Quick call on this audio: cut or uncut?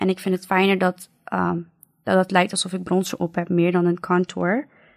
uncut